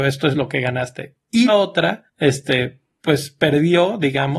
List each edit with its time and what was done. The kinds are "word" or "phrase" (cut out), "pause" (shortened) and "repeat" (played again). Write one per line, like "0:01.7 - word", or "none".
0:01.5 - word
0:02.1 - pause